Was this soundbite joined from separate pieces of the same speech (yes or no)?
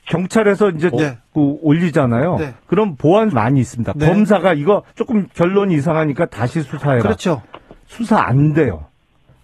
yes